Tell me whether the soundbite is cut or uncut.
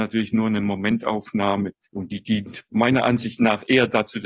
cut